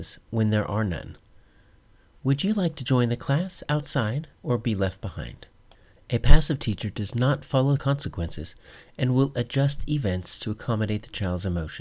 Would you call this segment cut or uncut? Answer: cut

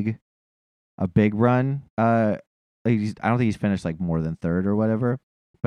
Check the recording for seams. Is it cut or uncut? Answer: cut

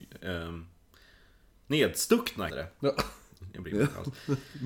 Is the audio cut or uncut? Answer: cut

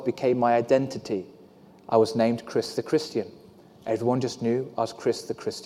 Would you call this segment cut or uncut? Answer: uncut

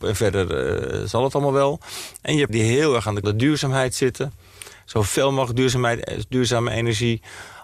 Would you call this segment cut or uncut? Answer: cut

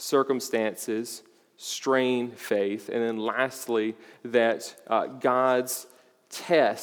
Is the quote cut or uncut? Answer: uncut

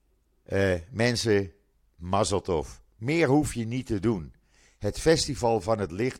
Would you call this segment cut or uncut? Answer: uncut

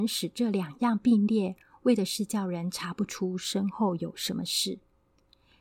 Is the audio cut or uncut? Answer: uncut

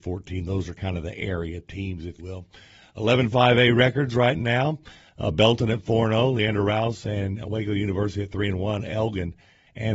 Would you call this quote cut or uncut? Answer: cut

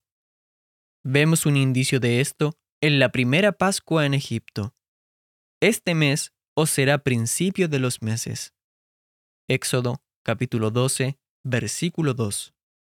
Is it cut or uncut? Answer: uncut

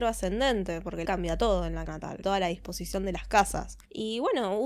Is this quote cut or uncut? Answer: cut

